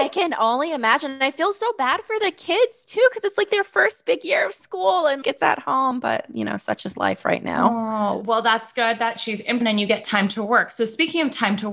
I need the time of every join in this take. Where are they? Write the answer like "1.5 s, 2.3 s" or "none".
5.2 s, 9.6 s